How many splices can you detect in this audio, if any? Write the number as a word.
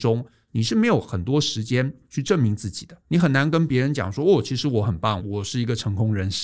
two